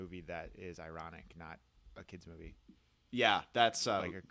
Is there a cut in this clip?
no; 0 cuts

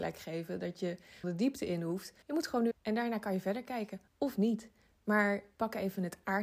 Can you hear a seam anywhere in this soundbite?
yes; 4 cuts; at 1.2 s, 2.2 s, 2.7 s, 4.1 s

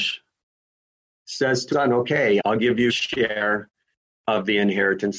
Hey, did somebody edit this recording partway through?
yes; 3 cuts; at 1.7 s, 2.4 s, 2.9 s

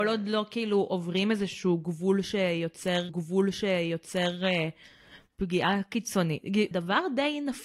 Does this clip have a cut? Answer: yes; 2 cuts; at 3.1 s, 6.7 s

